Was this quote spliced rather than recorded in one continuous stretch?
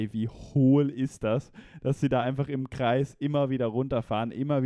no; 0 cuts

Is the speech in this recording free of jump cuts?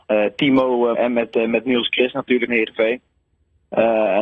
no; 2 cuts; at 0.9 s, 2.5 s

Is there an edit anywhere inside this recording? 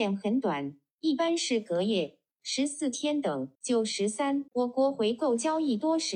yes; 3 cuts; at 2.3 s, 3.5 s, 4.5 s

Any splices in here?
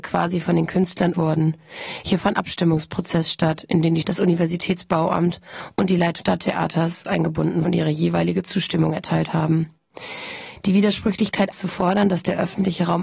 yes; 6 cuts; at 1.1 s, 2.3 s, 4.0 s, 6.2 s, 7.6 s, 11.5 s

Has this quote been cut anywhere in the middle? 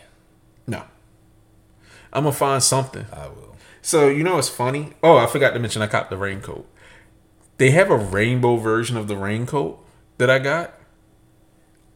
no; 0 cuts

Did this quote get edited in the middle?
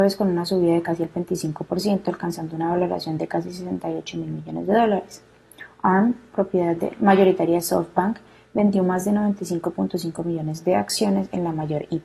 no; 0 cuts

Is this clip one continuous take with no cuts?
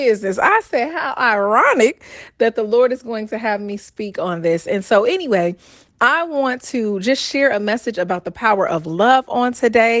yes; 0 cuts

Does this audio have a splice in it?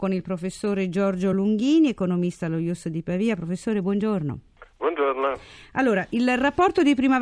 no; 0 cuts

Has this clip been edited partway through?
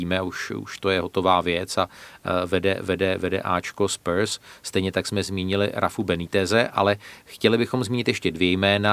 no; 0 cuts

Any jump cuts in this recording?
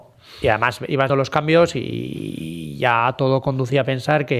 yes; 1 cut; at 1.1 s

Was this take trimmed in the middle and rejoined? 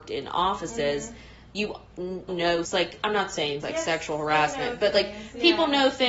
yes; 3 cuts; at 2.3 s, 2.6 s, 3.6 s

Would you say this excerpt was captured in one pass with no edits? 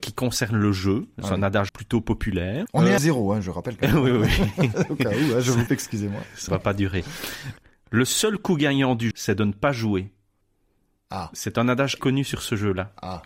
no; 7 cuts; at 1.7 s, 2.7 s, 3.0 s, 5.7 s, 6.5 s, 9.1 s, 12.0 s

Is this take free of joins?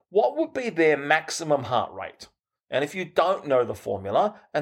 yes; 0 cuts

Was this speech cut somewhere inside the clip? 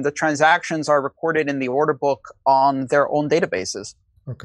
no; 0 cuts

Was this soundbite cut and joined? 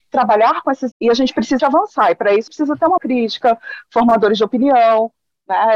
yes; 4 cuts; at 0.9 s, 1.6 s, 2.5 s, 3.0 s

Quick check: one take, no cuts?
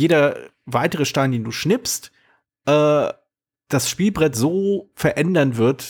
yes; 0 cuts

